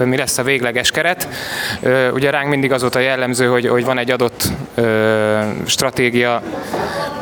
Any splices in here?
no; 0 cuts

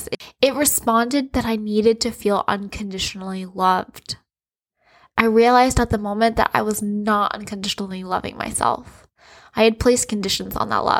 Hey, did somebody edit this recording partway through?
no; 0 cuts

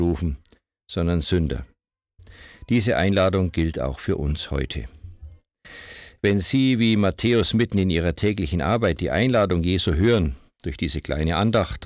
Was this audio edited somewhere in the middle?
no; 0 cuts

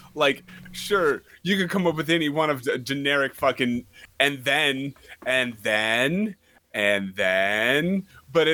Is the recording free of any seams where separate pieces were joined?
yes; 0 cuts

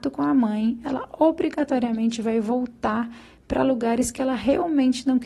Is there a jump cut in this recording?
no; 0 cuts

